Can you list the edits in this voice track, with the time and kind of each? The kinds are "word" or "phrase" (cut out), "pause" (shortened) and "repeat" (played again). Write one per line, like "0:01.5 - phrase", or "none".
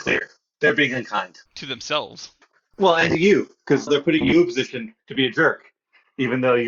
0:01.5 - pause
0:02.4 - pause
0:03.9 - word